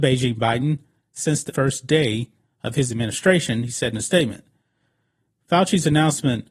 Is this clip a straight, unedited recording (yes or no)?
no